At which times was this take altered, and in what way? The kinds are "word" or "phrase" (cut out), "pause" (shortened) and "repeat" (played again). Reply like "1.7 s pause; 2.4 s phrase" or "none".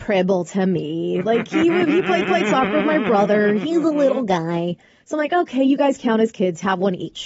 2.2 s repeat